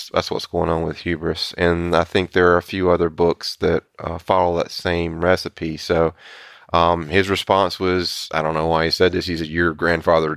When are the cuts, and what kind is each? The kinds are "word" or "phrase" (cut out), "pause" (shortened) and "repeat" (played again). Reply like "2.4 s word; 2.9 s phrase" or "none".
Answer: none